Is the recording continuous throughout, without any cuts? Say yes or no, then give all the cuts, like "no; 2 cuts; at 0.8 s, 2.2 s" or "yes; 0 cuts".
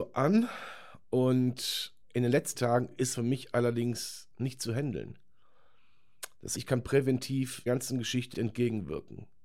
no; 7 cuts; at 2.0 s, 2.5 s, 3.1 s, 4.3 s, 6.5 s, 7.7 s, 8.3 s